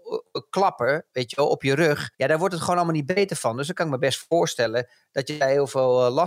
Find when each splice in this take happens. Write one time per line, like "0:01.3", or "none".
0:02.1